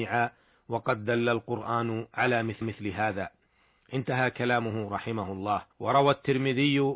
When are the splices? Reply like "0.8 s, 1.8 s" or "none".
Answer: 2.6 s, 5.7 s